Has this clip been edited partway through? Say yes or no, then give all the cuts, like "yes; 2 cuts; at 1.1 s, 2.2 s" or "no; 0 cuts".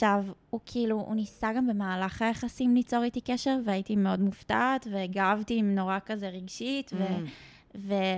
no; 0 cuts